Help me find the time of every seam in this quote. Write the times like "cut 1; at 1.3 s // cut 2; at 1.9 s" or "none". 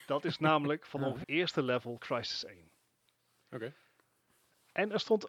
cut 1; at 1.2 s // cut 2; at 2.0 s